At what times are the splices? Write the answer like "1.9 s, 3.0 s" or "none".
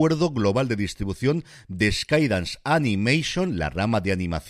none